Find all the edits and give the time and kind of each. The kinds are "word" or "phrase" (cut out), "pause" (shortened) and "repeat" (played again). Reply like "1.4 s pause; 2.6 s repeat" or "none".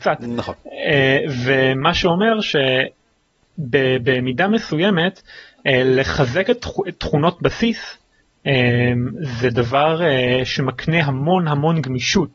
none